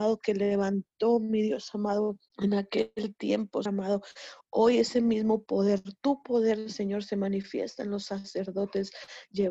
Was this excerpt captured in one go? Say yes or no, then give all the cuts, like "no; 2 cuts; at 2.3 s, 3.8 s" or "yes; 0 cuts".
no; 3 cuts; at 2.3 s, 3.7 s, 4.4 s